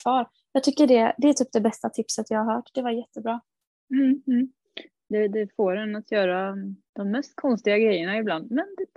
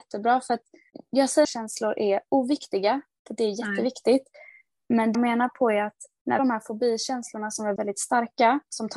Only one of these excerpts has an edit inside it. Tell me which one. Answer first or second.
second